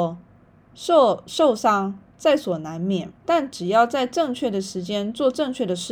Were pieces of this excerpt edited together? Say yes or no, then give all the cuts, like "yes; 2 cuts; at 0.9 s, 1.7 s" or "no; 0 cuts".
yes; 1 cut; at 3.2 s